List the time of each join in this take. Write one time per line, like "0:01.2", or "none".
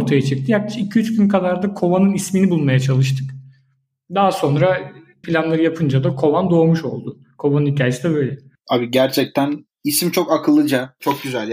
0:05.2